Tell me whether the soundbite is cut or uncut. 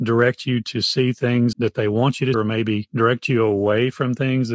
cut